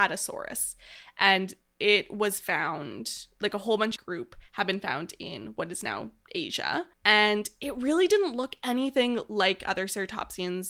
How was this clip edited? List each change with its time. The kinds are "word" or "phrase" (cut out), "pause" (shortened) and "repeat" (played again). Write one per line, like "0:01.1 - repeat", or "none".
0:04.0 - phrase
0:06.9 - pause